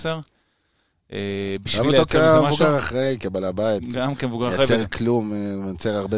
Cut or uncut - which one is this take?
uncut